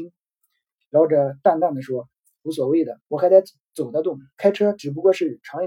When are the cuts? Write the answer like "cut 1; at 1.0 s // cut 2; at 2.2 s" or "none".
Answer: cut 1; at 3.0 s // cut 2; at 4.3 s